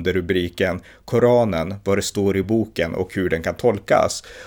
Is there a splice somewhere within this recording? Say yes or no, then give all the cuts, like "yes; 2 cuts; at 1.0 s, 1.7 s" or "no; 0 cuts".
no; 0 cuts